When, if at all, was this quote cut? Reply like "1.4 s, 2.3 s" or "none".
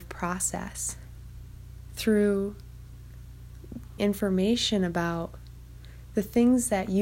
4.0 s